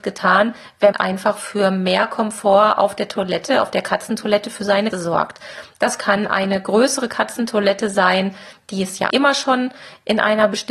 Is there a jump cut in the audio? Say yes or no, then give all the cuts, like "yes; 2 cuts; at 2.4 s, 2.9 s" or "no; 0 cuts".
yes; 3 cuts; at 0.9 s, 4.9 s, 9.1 s